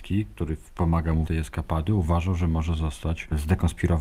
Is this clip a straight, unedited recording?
no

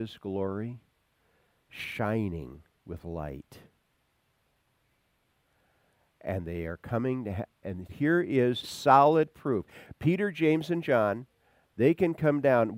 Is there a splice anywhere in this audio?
yes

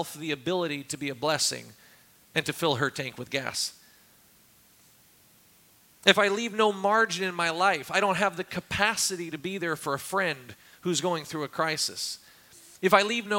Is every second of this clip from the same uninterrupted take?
yes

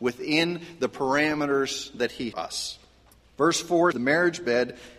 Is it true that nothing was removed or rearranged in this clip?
no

